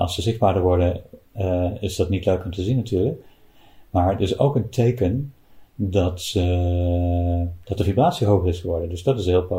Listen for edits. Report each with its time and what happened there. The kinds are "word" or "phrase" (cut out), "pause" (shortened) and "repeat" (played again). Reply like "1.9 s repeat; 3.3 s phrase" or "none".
1.2 s pause